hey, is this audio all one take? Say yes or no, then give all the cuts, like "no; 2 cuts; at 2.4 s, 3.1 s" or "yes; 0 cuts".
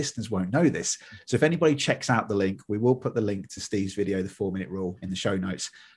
yes; 0 cuts